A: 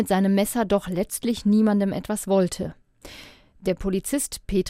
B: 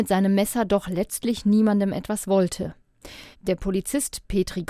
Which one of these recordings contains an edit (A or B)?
B